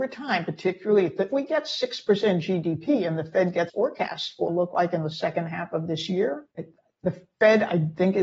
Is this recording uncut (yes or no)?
no